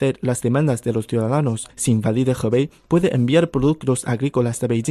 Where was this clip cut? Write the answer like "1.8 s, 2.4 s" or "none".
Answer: 1.7 s